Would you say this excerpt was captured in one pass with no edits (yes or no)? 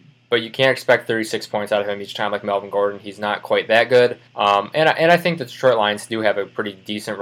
no